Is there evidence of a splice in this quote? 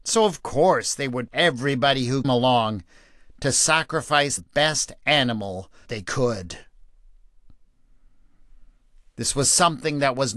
yes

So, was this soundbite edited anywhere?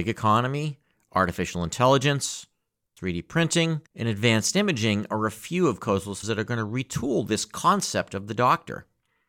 yes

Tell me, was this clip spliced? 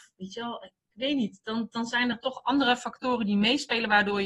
no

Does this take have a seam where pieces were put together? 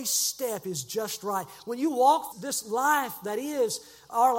yes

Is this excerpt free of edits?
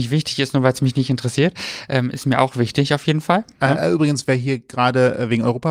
yes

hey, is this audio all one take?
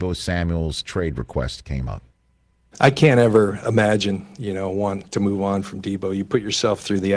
no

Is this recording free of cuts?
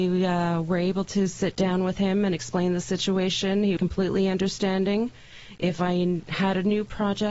no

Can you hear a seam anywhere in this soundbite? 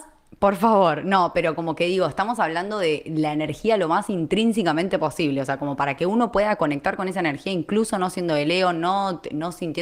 no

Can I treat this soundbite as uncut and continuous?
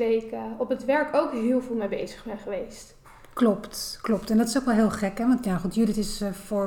yes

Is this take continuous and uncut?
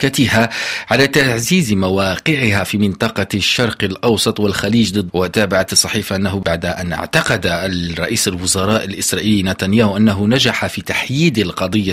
no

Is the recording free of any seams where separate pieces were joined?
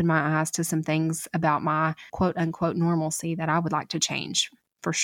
no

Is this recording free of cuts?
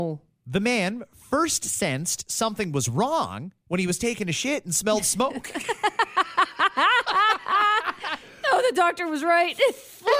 no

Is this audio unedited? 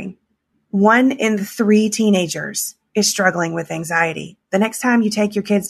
no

